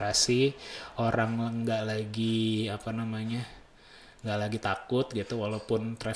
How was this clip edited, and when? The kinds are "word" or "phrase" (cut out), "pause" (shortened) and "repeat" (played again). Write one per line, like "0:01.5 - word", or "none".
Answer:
none